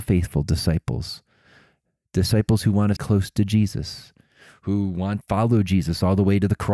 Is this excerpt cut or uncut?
cut